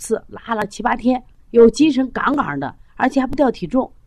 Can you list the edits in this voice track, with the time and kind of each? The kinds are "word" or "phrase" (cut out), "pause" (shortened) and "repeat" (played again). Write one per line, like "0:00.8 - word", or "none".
0:01.3 - pause